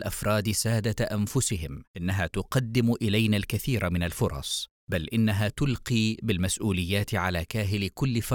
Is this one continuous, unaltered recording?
no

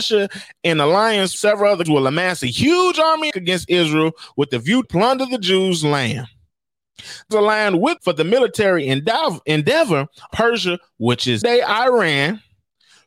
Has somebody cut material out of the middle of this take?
yes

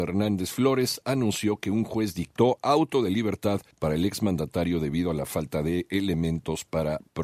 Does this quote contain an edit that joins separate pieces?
yes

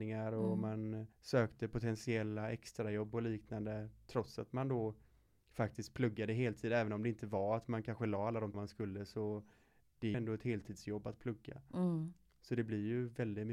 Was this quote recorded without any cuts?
no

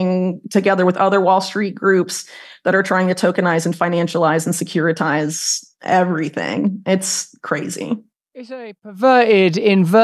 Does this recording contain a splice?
no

